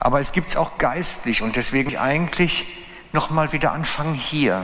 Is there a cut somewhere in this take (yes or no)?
yes